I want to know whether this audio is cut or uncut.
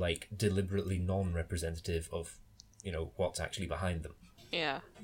uncut